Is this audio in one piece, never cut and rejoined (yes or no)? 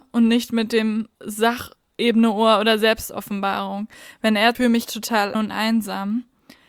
no